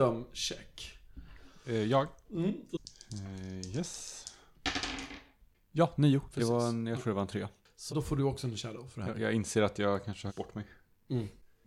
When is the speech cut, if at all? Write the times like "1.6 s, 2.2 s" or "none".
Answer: 7.9 s, 10.3 s